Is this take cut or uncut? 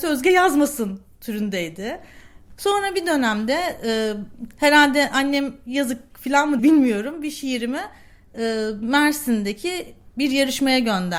cut